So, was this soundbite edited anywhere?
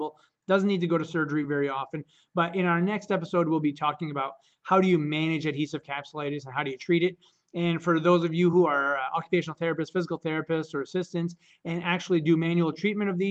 no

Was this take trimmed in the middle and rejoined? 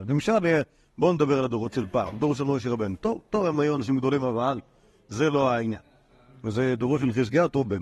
no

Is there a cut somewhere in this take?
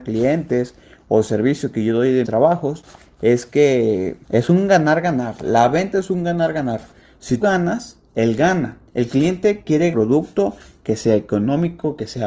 yes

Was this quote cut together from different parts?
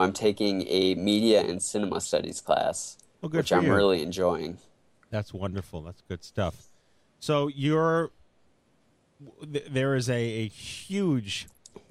no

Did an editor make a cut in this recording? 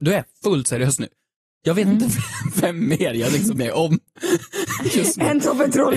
yes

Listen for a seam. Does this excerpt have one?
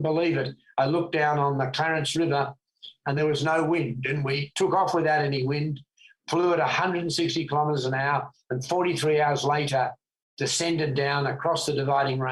no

